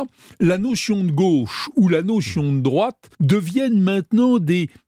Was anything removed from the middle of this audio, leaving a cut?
yes; 1 cut; at 3.1 s

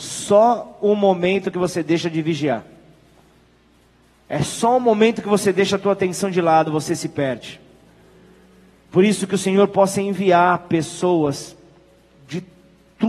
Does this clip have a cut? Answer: no; 0 cuts

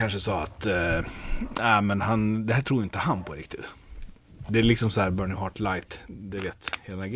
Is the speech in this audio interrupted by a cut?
no; 0 cuts

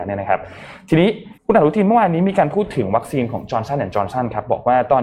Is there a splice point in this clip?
yes; 1 cut; at 1.4 s

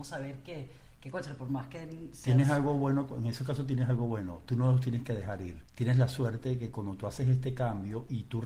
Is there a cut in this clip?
no; 0 cuts

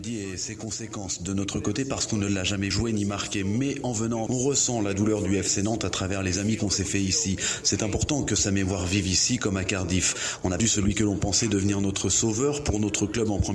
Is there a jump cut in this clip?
yes; 3 cuts; at 2.7 s, 4.3 s, 10.6 s

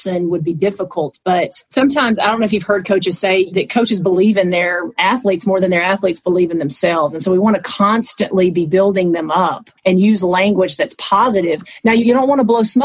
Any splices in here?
yes; 2 cuts; at 1.7 s, 9.8 s

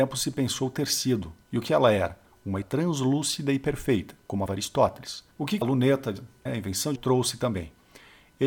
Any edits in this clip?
yes; 7 cuts; at 1.4 s, 2.6 s, 4.5 s, 5.3 s, 5.6 s, 6.5 s, 7.0 s

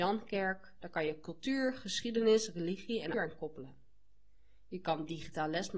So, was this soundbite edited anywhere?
yes; 1 cut; at 3.1 s

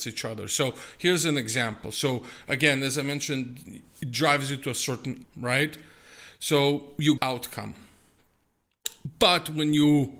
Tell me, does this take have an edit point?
yes; 2 cuts; at 5.2 s, 7.2 s

